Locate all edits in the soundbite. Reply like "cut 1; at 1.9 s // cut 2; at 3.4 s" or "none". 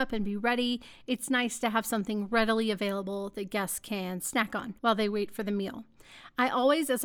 cut 1; at 4.8 s